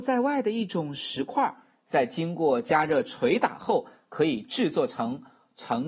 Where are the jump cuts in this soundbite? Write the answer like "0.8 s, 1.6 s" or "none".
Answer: none